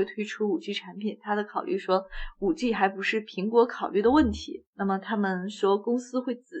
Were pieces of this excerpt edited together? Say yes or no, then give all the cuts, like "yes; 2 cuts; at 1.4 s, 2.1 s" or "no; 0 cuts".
yes; 1 cut; at 4.7 s